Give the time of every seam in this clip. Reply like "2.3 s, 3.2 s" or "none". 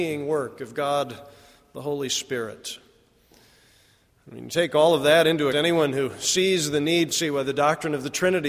5.5 s, 7.1 s